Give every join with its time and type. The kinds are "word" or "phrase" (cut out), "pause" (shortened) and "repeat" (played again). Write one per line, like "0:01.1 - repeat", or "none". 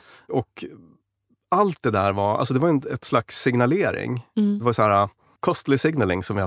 none